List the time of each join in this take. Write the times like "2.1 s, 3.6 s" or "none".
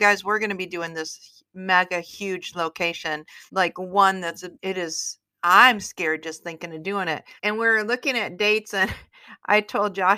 1.5 s, 3.5 s, 4.5 s, 7.4 s